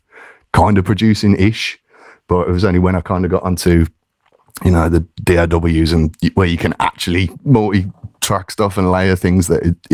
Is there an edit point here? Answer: no; 0 cuts

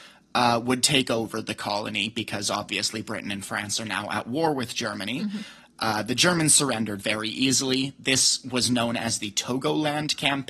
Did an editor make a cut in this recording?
no; 0 cuts

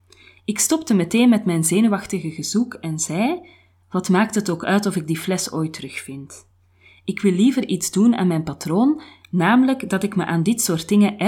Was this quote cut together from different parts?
no; 0 cuts

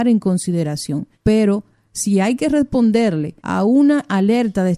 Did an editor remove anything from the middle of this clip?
yes; 2 cuts; at 1.1 s, 3.4 s

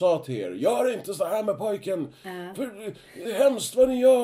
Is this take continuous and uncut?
no; 1 cut; at 3.2 s

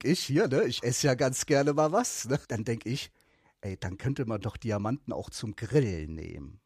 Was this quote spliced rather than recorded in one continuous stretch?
no; 0 cuts

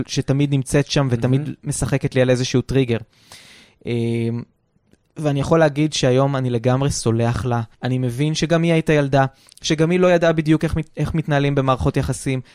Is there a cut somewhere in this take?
yes; 1 cut; at 7.7 s

